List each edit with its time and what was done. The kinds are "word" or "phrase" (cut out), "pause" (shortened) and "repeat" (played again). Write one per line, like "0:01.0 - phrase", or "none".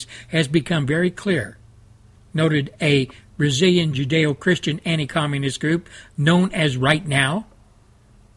none

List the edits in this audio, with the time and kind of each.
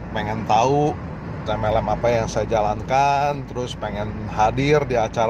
0:01.5 - phrase

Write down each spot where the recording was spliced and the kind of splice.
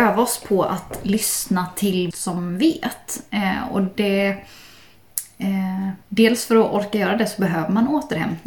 0:02.1 - phrase
0:06.0 - pause

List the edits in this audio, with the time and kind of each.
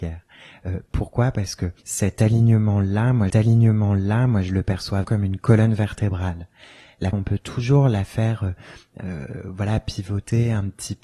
0:01.8 - pause
0:03.3 - repeat
0:05.0 - word
0:07.1 - phrase

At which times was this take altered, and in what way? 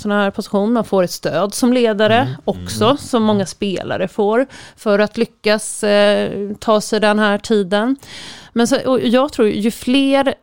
none

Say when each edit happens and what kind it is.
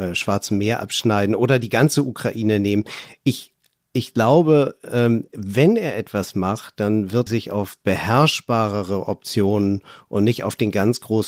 0:07.3 - word

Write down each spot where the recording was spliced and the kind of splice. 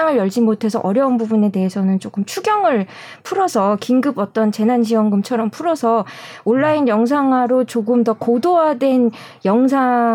none

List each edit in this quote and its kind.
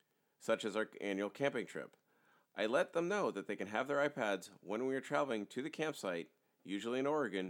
none

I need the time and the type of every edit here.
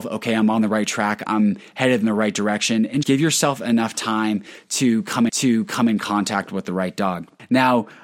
0:03.0 - word
0:05.3 - repeat

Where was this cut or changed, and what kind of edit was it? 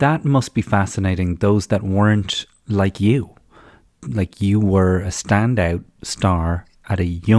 none

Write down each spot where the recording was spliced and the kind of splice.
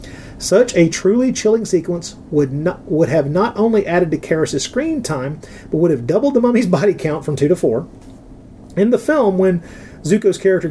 none

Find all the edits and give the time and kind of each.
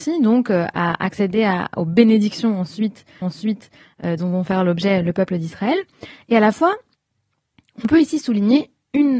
0:03.2 - repeat

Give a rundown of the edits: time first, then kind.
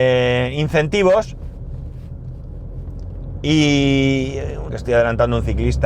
0:04.7 - word

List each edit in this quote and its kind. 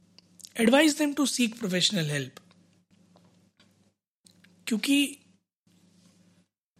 none

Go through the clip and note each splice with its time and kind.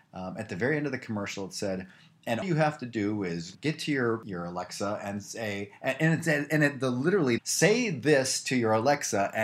0:02.4 - word
0:07.4 - phrase

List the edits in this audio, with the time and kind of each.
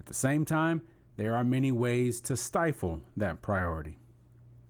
none

